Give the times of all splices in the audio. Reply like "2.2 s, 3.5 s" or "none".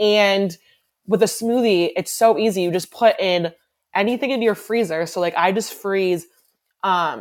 none